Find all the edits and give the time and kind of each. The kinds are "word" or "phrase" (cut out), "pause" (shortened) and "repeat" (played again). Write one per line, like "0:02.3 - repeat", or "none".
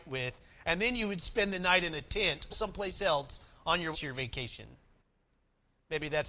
0:02.5 - word
0:03.9 - word

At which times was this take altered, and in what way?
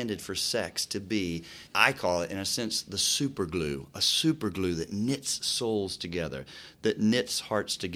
0:01.7 - pause

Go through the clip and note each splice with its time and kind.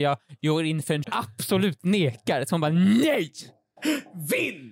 0:01.0 - phrase

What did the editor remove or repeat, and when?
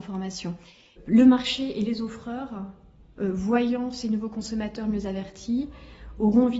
none

